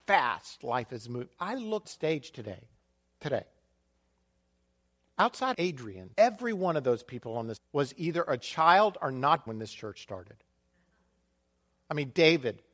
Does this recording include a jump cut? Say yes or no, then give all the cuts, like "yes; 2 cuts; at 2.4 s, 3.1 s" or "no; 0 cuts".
yes; 6 cuts; at 1.8 s, 2.8 s, 5.5 s, 6.1 s, 7.6 s, 9.5 s